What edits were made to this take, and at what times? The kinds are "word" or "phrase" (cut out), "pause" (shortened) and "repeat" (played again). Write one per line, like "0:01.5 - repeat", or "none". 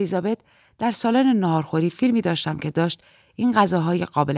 none